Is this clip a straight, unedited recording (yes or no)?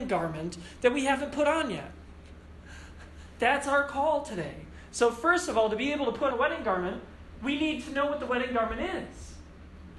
no